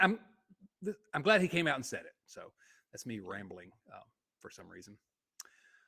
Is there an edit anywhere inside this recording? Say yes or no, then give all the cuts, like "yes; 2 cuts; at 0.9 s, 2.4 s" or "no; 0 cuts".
no; 0 cuts